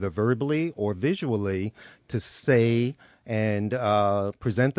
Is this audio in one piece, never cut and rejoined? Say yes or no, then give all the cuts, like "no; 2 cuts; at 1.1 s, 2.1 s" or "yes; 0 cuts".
yes; 0 cuts